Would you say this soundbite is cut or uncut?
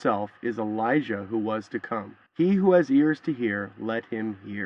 cut